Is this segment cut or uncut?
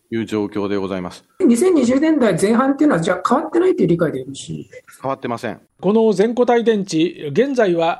cut